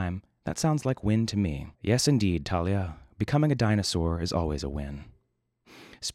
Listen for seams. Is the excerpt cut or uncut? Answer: cut